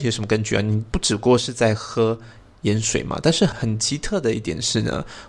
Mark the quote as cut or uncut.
uncut